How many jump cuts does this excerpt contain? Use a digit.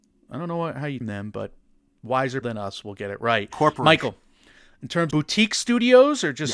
3